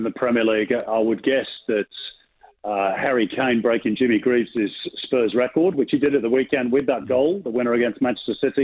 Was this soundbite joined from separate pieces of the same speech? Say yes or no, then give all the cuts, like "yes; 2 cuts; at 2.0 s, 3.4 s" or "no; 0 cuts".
no; 0 cuts